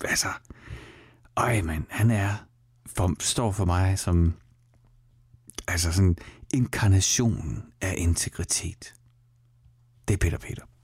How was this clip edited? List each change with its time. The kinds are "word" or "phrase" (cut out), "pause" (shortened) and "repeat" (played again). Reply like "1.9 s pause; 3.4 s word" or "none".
none